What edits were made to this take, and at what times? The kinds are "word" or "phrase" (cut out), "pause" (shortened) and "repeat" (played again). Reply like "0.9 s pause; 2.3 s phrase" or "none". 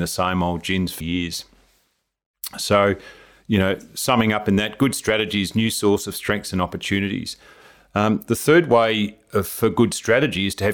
1.0 s word